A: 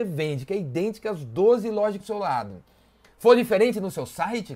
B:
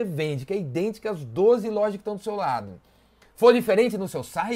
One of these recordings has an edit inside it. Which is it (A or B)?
A